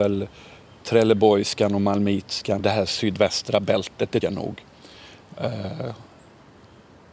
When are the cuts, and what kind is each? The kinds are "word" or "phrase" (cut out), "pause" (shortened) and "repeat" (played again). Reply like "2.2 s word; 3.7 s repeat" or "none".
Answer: 2.6 s word; 4.2 s word